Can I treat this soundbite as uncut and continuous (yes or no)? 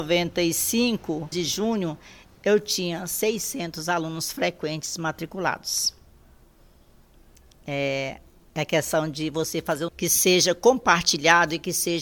no